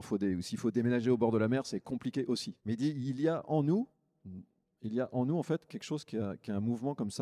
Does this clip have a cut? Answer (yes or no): yes